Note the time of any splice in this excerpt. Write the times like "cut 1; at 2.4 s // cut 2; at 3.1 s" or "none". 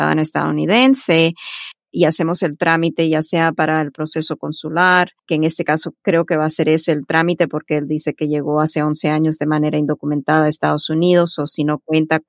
cut 1; at 5.2 s